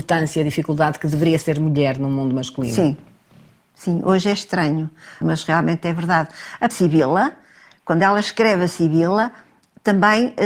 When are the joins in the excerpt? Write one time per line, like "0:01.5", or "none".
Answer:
0:01.4
0:05.2
0:06.7